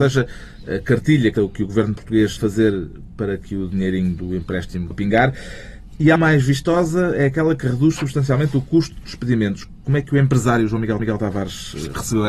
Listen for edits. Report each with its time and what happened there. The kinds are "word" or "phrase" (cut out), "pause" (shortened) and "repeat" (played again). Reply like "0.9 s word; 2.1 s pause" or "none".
1.3 s word; 2.4 s word; 4.9 s word; 6.2 s word; 9.0 s word; 11.0 s repeat

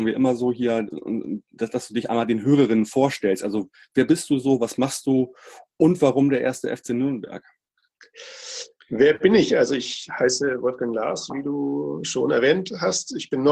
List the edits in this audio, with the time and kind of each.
none

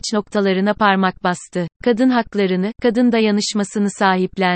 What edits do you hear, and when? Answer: 1.7 s pause

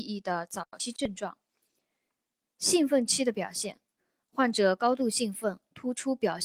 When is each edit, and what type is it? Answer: none

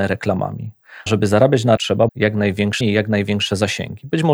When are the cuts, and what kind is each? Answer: 1.1 s word; 1.8 s word; 2.1 s word; 2.8 s word

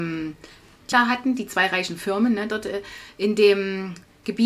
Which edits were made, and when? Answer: 0.9 s phrase

